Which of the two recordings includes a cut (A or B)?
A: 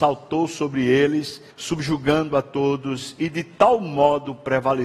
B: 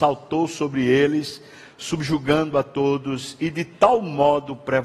A